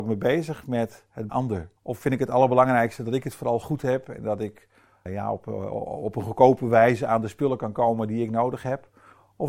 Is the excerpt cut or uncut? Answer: cut